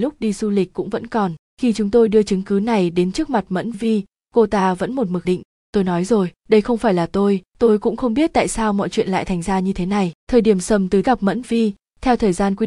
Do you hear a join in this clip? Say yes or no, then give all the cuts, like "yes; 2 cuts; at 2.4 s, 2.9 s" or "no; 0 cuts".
yes; 8 cuts; at 1.4 s, 3.7 s, 5.2 s, 6.4 s, 7.5 s, 10.2 s, 11.0 s, 11.4 s